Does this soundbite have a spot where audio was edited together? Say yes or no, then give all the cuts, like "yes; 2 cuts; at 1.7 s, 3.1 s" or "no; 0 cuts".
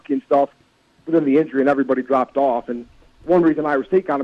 no; 0 cuts